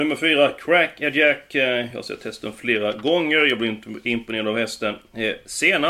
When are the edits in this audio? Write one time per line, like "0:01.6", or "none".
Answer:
none